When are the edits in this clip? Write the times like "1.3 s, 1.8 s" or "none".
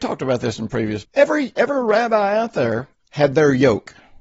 1.0 s